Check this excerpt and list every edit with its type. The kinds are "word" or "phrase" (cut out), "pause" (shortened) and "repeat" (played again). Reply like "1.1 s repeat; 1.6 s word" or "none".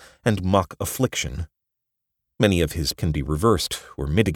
3.0 s word

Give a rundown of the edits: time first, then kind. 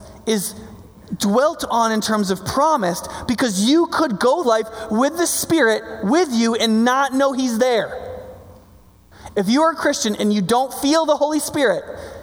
4.4 s word

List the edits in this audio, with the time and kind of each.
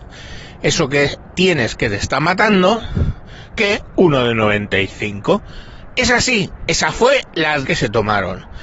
7.6 s word

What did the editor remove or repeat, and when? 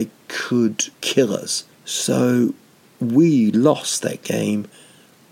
0.9 s pause; 1.7 s pause

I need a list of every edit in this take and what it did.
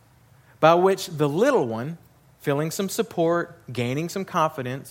none

